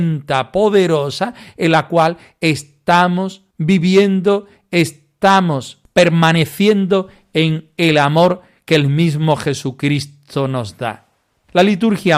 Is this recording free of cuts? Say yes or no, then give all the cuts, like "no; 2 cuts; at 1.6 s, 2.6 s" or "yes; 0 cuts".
yes; 0 cuts